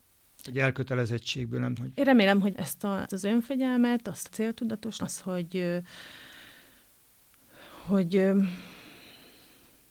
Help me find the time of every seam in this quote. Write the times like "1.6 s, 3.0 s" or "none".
1.8 s, 2.5 s, 3.1 s, 4.3 s, 5.0 s